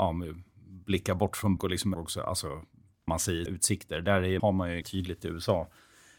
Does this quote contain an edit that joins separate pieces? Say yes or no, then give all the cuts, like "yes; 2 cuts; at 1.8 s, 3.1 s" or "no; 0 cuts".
yes; 6 cuts; at 1.6 s, 1.9 s, 3.1 s, 3.5 s, 4.4 s, 4.8 s